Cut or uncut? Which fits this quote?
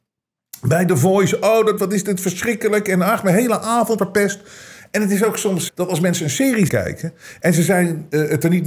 cut